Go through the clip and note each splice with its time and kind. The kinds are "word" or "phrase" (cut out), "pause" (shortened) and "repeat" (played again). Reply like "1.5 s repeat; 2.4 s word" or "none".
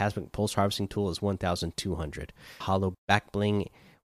2.6 s word; 2.9 s word